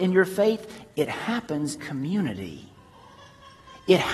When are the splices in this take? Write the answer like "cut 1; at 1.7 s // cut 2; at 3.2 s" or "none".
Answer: cut 1; at 1.8 s